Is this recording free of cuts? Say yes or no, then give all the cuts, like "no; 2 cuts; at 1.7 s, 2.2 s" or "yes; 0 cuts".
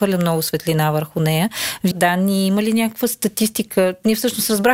no; 1 cut; at 1.9 s